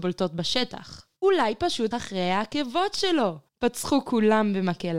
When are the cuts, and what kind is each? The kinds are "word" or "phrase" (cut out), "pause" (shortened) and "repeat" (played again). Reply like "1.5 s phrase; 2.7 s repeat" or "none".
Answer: 1.2 s pause; 1.9 s word; 3.5 s pause